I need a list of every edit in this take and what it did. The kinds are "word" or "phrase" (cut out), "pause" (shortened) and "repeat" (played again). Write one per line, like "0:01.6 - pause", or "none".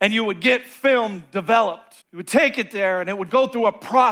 0:02.0 - pause